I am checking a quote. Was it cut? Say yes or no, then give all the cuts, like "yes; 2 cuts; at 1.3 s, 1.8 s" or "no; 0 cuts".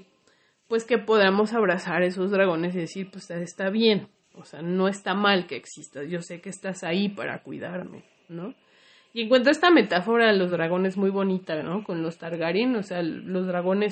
no; 0 cuts